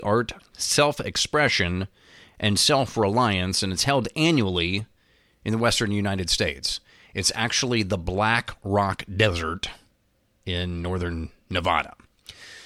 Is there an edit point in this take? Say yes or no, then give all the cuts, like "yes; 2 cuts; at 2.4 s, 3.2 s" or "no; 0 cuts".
no; 0 cuts